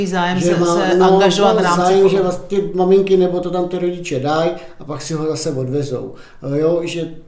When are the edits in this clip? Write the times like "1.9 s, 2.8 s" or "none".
3.4 s